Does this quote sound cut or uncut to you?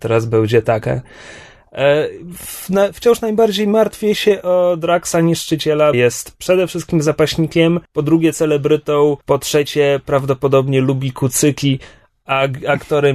cut